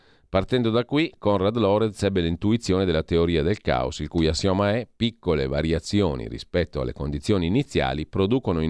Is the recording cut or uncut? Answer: uncut